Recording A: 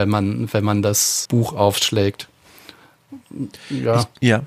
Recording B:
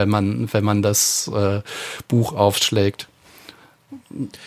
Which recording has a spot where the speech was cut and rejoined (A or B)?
A